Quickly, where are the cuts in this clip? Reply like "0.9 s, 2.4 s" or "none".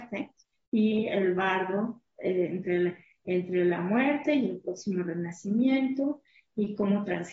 none

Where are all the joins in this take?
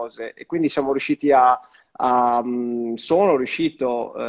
none

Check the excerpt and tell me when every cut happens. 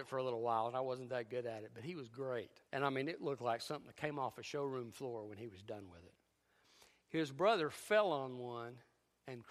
2.7 s

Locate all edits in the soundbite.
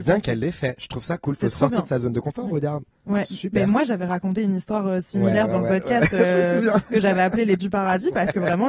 7.6 s

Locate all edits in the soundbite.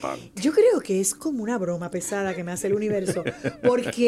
none

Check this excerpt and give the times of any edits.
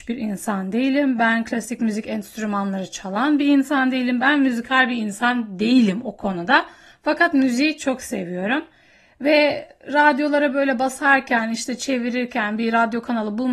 none

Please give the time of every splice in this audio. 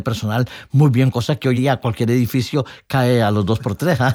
1.1 s, 1.5 s

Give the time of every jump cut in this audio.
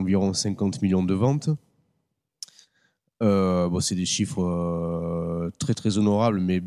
none

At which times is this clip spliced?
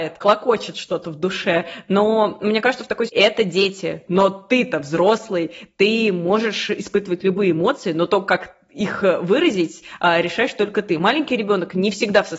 3.1 s

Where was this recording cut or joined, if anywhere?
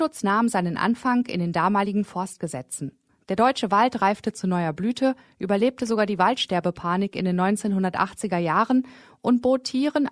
none

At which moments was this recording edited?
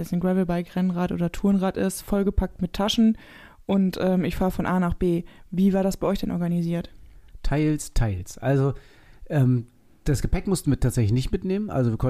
none

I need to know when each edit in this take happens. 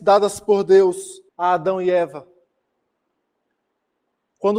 1.3 s

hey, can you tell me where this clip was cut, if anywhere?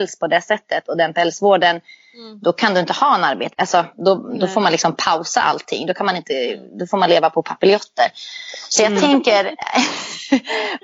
none

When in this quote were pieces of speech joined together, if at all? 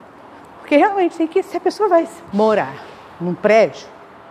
2.3 s

